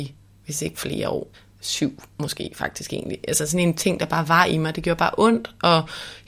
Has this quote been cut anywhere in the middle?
yes; 1 cut; at 1.3 s

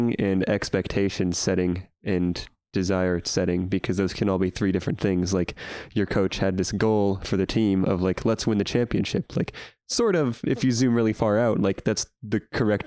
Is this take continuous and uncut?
yes; 0 cuts

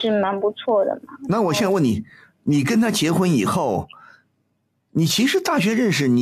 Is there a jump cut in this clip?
no; 0 cuts

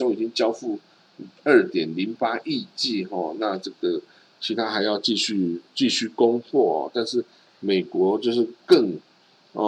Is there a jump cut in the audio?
no; 0 cuts

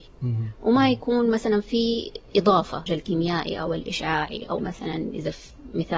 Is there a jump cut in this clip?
yes; 2 cuts; at 2.9 s, 4.6 s

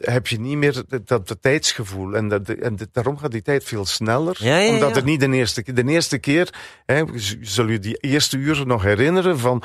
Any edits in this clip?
no; 0 cuts

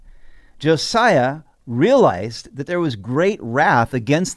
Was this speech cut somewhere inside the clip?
no; 0 cuts

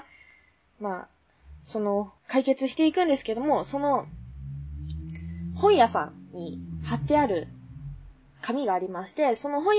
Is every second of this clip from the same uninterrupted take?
no; 1 cut; at 2.2 s

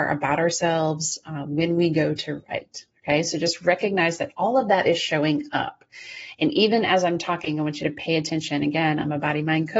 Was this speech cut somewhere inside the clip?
no; 0 cuts

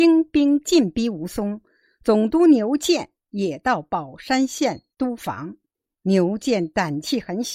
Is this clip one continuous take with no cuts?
yes; 0 cuts

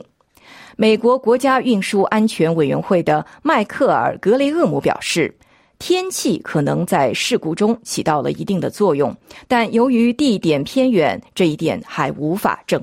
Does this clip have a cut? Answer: no; 0 cuts

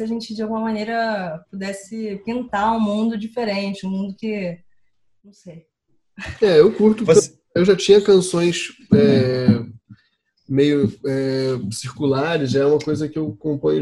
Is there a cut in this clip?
no; 0 cuts

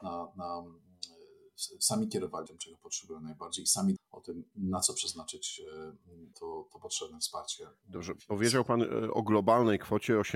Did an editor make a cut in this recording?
yes; 4 cuts; at 2.5 s, 4.0 s, 6.3 s, 6.7 s

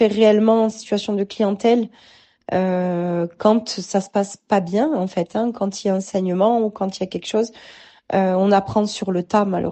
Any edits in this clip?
no; 0 cuts

